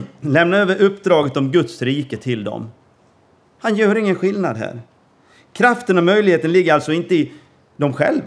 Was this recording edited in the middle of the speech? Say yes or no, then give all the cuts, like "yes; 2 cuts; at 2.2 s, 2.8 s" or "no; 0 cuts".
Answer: no; 0 cuts